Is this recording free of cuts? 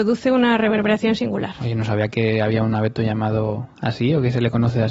yes; 0 cuts

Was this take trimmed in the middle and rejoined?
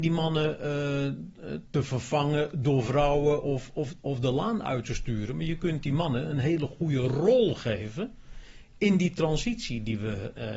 no; 0 cuts

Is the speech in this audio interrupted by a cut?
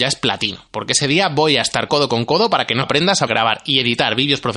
yes; 3 cuts; at 1.9 s, 2.8 s, 3.3 s

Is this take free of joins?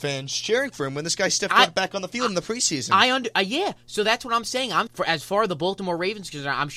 no; 1 cut; at 4.9 s

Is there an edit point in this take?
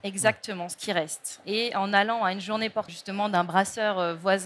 yes; 1 cut; at 2.9 s

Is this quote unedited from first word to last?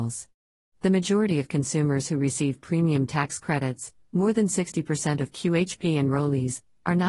yes; 0 cuts

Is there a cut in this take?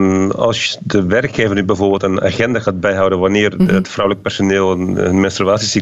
no; 0 cuts

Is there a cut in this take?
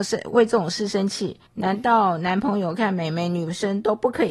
yes; 1 cut; at 1.5 s

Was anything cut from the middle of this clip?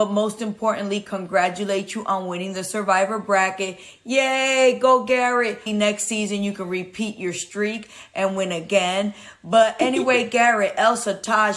yes; 1 cut; at 5.7 s

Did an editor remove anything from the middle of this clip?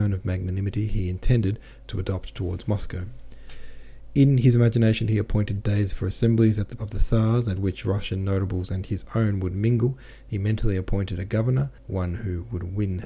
yes; 2 cuts; at 6.8 s, 11.8 s

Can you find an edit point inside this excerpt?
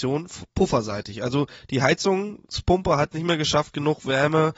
yes; 1 cut; at 3.1 s

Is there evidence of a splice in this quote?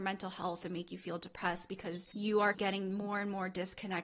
yes; 1 cut; at 2.5 s

